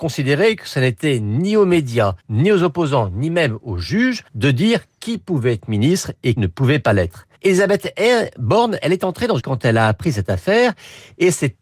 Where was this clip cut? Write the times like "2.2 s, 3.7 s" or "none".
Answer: 2.2 s, 4.3 s, 6.4 s, 7.3 s, 8.8 s, 9.4 s